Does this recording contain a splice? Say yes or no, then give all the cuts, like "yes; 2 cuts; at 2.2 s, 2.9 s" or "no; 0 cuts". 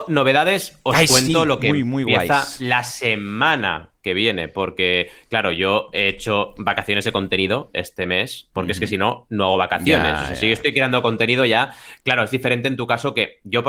no; 0 cuts